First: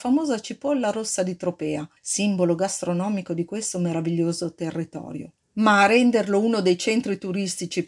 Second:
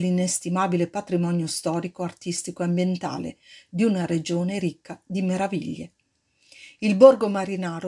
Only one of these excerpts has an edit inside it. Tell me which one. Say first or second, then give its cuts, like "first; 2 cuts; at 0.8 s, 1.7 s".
first; 2 cuts; at 2.0 s, 5.4 s